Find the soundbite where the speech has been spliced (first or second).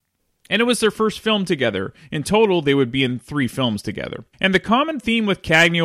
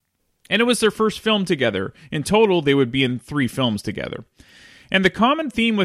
first